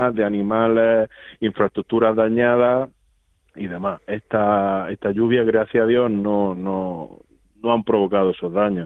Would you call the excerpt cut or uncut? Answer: uncut